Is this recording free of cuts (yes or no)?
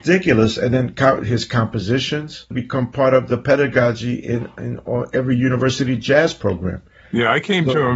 yes